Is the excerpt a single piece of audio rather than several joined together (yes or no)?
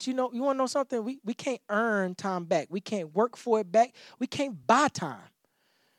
yes